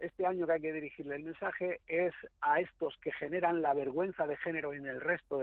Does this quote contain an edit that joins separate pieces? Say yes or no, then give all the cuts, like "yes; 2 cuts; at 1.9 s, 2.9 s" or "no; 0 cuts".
no; 0 cuts